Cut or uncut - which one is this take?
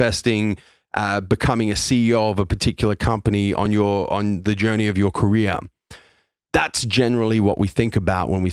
uncut